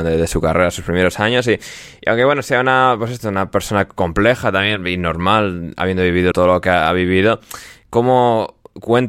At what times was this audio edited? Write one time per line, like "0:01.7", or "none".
0:06.3